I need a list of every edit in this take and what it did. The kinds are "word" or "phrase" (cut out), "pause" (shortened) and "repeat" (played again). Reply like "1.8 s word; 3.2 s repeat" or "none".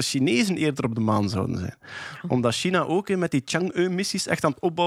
none